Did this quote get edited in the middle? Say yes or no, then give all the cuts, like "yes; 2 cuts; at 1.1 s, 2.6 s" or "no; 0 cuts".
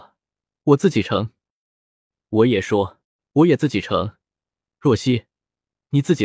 yes; 1 cut; at 3.0 s